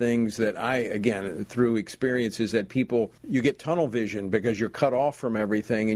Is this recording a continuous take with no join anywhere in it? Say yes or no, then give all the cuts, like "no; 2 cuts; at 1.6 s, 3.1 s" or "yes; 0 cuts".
no; 1 cut; at 3.2 s